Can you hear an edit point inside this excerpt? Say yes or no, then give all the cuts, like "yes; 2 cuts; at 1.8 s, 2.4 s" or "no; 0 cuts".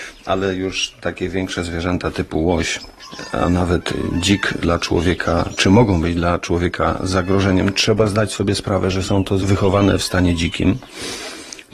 yes; 2 cuts; at 4.6 s, 9.4 s